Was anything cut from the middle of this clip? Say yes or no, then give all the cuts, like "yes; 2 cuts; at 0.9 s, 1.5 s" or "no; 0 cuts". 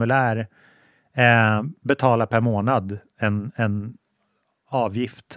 no; 0 cuts